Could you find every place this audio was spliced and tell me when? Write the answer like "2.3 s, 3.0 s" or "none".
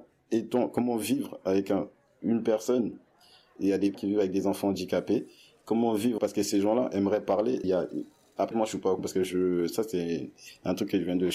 3.6 s, 3.9 s, 6.2 s, 7.6 s, 8.5 s, 9.0 s

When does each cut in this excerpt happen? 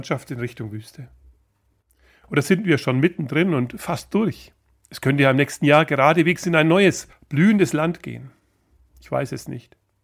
none

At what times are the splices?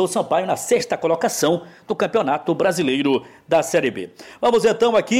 none

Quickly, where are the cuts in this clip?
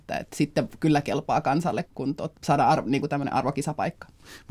1.8 s, 2.3 s

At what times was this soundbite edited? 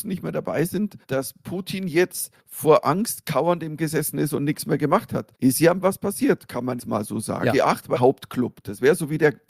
1.0 s, 2.4 s, 3.8 s, 5.3 s, 5.8 s, 6.8 s, 8.0 s

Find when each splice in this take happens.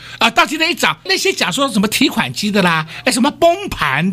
1.1 s

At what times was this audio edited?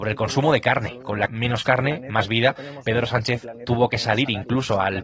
1.3 s

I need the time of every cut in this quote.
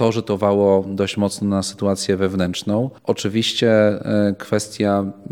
3.0 s

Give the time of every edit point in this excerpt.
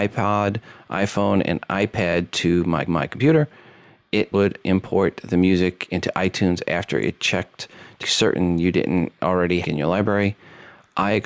2.9 s, 4.3 s, 8.0 s, 9.6 s

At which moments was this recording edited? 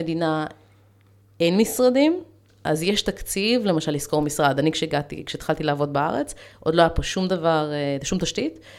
none

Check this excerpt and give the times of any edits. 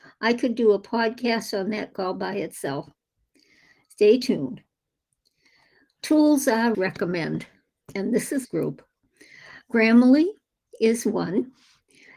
1.9 s, 6.7 s, 8.4 s

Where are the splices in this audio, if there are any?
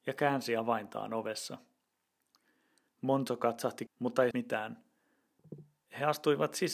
3.9 s, 4.3 s

